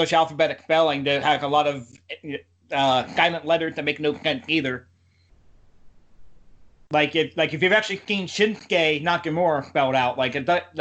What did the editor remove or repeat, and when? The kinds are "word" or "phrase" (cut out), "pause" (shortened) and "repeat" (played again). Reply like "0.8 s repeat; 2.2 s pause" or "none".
none

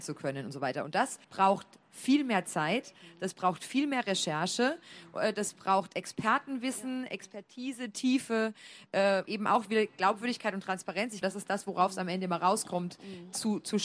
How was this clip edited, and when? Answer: 1.2 s pause; 9.3 s word; 11.2 s word

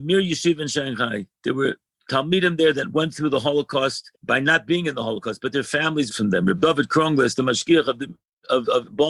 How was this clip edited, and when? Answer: 1.4 s pause; 1.9 s pause; 4.2 s pause; 6.1 s phrase

